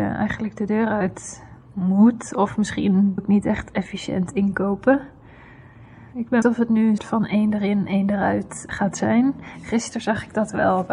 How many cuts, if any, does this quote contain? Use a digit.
4